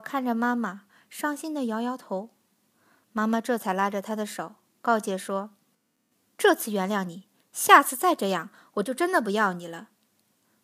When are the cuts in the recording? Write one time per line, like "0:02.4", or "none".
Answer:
none

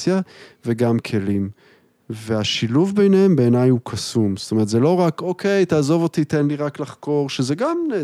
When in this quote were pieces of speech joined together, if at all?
none

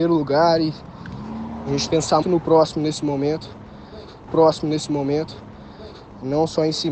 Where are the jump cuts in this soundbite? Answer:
0:01.9
0:02.2
0:04.3

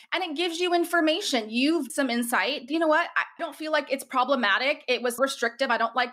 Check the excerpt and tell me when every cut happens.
0:01.9
0:02.7
0:03.4
0:05.2

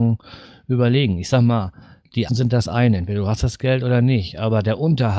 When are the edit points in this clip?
0:02.3

